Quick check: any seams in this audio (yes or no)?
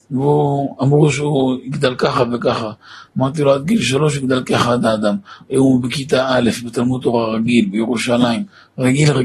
no